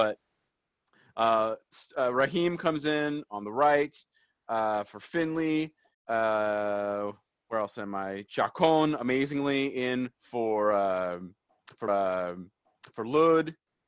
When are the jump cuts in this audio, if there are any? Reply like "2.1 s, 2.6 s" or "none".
5.9 s, 10.1 s, 11.9 s